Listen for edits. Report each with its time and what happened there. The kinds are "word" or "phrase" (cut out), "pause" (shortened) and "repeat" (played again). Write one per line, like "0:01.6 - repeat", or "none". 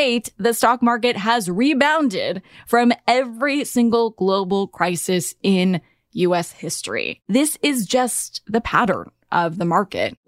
none